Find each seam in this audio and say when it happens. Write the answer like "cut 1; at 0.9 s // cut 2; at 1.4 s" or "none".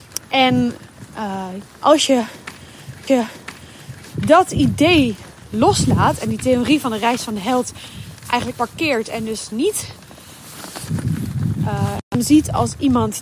cut 1; at 1.7 s // cut 2; at 3.1 s // cut 3; at 8.5 s